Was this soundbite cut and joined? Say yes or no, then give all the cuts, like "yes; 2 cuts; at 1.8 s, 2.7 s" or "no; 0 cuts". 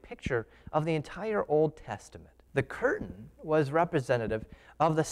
yes; 1 cut; at 2.5 s